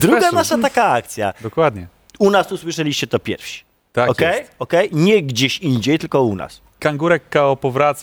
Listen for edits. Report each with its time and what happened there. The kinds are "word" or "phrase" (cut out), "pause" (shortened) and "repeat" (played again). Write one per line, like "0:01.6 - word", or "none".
none